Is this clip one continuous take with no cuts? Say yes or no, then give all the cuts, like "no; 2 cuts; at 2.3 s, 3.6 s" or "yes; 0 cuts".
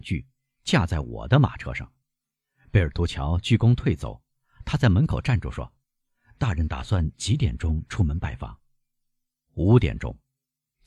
no; 2 cuts; at 2.0 s, 5.8 s